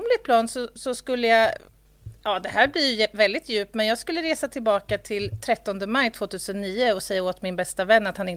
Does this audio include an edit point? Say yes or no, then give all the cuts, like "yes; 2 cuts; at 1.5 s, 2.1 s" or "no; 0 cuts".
no; 0 cuts